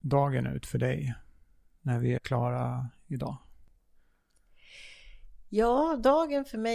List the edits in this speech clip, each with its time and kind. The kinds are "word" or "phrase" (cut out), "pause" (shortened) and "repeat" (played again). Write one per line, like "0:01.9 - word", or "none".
0:01.8 - word
0:02.2 - word